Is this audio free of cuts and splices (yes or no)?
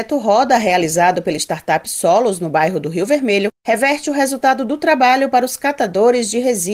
yes